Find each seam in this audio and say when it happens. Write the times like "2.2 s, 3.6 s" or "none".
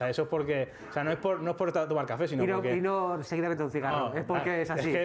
3.6 s